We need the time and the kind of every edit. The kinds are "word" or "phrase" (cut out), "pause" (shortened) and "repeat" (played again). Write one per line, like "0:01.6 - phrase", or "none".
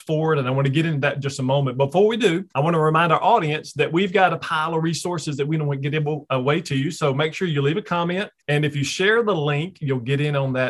0:02.5 - pause
0:08.4 - pause